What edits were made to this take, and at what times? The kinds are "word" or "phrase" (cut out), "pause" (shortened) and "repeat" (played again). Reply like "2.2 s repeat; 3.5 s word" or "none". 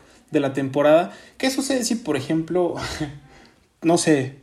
none